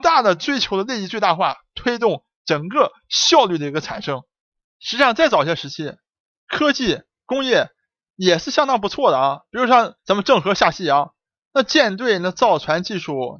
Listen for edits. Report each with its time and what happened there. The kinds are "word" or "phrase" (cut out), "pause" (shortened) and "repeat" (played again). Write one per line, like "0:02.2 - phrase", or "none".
0:10.0 - pause